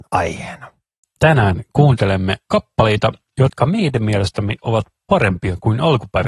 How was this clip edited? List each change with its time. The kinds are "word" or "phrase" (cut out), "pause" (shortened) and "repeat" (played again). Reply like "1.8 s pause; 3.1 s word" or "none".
none